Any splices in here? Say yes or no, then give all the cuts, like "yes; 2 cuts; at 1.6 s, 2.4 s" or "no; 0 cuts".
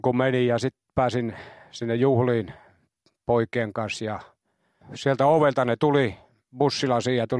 no; 0 cuts